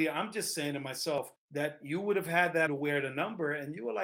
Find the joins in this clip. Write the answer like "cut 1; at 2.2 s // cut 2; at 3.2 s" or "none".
cut 1; at 1.4 s // cut 2; at 2.7 s

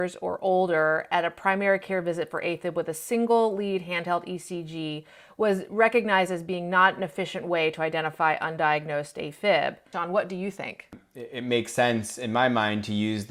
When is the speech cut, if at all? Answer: none

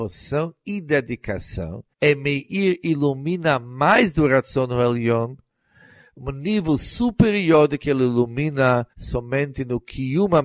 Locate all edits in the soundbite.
cut 1; at 1.9 s // cut 2; at 8.9 s

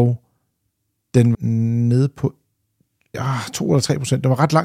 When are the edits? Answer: cut 1; at 1.3 s // cut 2; at 3.1 s

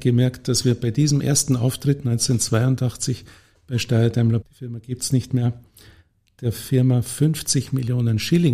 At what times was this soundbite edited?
cut 1; at 4.4 s

